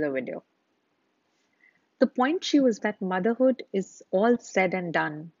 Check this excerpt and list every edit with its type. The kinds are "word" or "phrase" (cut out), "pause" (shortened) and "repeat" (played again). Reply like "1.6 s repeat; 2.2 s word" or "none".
2.8 s phrase